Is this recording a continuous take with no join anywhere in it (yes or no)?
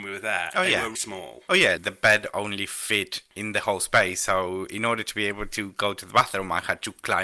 no